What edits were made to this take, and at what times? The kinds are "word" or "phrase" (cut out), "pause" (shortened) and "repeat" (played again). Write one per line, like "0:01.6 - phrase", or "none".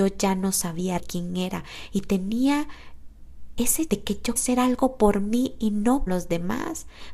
0:01.0 - word
0:03.9 - word
0:04.4 - word
0:06.1 - word